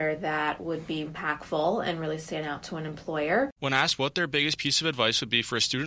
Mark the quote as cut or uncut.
cut